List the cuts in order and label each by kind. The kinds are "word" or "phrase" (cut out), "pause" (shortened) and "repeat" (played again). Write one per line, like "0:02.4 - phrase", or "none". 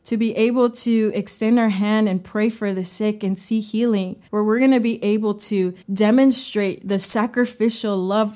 0:04.3 - pause
0:05.8 - pause